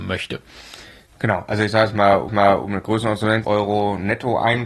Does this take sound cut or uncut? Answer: cut